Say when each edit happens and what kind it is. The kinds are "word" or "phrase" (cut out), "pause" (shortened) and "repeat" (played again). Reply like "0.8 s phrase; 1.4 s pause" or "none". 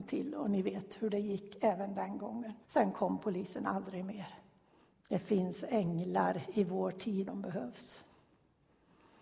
2.6 s pause; 4.8 s pause; 7.3 s word